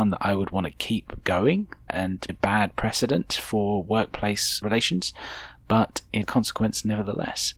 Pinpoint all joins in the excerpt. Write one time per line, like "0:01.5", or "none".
0:01.9
0:02.3
0:04.6
0:06.2